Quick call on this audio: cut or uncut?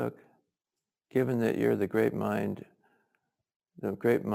uncut